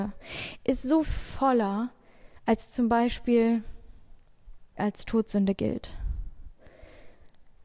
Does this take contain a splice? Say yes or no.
yes